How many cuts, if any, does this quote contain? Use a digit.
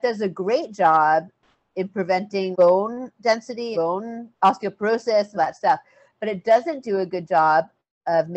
4